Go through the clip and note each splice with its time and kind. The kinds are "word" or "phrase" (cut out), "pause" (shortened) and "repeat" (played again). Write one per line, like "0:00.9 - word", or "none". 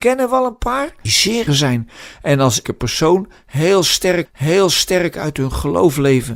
0:01.1 - word
0:01.5 - word
0:02.6 - word
0:04.3 - repeat